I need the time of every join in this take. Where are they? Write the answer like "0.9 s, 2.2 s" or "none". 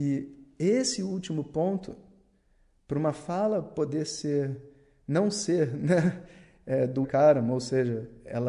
7.0 s